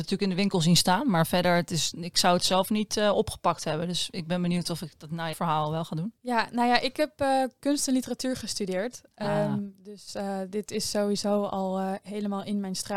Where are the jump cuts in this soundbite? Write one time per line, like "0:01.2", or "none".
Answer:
0:05.3
0:06.2